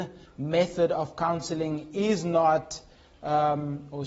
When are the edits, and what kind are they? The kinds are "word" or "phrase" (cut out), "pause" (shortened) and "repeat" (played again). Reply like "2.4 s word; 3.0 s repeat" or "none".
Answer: none